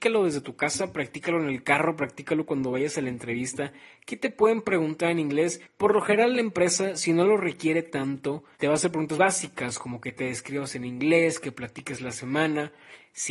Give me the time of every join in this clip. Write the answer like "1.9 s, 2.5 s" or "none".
8.5 s, 9.2 s